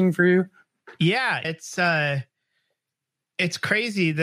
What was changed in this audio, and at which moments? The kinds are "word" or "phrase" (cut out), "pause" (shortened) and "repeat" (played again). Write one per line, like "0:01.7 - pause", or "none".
0:01.4 - word